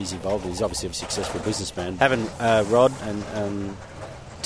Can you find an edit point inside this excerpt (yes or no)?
yes